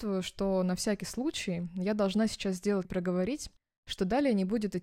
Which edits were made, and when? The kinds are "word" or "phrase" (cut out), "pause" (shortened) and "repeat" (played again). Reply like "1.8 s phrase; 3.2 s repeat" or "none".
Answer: 2.8 s phrase